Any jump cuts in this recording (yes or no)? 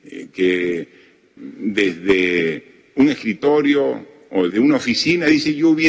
yes